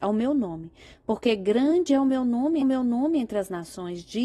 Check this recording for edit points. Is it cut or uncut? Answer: cut